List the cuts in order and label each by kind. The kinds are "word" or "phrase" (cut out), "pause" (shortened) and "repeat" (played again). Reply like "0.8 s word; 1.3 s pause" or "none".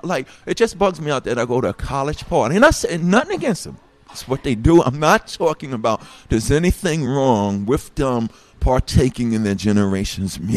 none